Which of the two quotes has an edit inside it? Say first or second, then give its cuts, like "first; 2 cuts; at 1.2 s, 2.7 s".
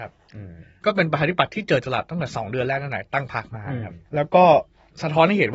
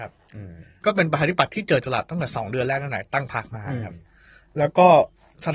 first; 1 cut; at 4.1 s